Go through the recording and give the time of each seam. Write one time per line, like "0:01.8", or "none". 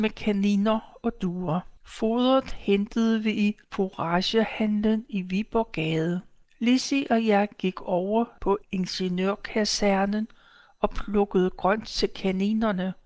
0:01.8
0:03.6
0:06.5
0:08.6